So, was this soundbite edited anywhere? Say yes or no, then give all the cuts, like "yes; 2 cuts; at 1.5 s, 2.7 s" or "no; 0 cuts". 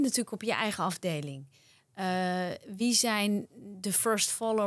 no; 0 cuts